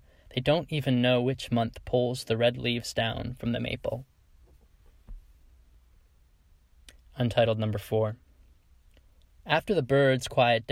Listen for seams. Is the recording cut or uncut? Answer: uncut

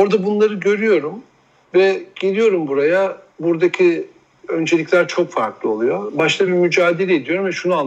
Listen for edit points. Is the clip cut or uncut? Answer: uncut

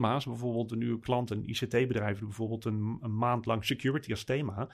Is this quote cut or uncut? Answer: cut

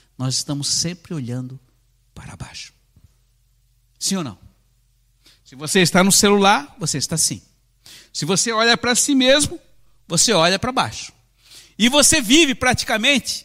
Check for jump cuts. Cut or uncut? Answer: uncut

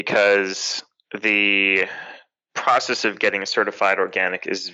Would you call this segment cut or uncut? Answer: uncut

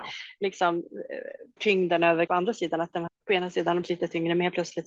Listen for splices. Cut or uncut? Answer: cut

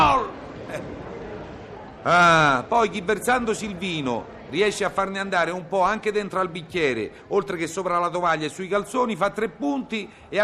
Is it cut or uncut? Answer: cut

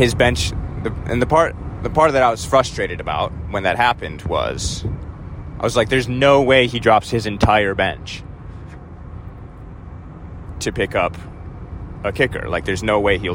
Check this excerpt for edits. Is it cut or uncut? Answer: uncut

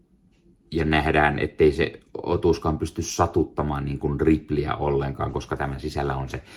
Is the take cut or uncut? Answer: uncut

